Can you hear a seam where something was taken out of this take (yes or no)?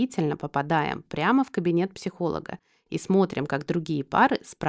no